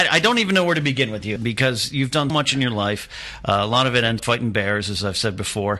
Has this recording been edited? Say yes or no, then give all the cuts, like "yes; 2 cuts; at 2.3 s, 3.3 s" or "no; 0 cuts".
yes; 3 cuts; at 1.4 s, 2.3 s, 4.2 s